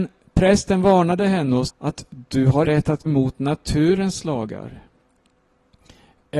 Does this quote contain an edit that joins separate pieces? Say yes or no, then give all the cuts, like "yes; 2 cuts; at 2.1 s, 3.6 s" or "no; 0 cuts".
yes; 3 cuts; at 1.7 s, 2.6 s, 3.1 s